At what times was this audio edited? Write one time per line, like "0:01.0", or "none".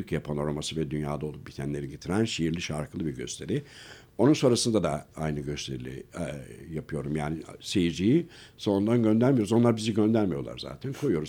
0:01.9